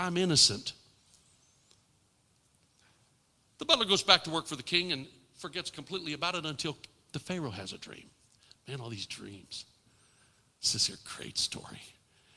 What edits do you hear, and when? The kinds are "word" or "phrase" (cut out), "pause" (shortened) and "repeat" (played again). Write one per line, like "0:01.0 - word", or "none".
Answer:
none